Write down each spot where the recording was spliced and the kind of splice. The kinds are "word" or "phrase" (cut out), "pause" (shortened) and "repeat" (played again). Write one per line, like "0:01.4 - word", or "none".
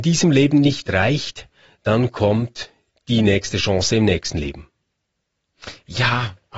none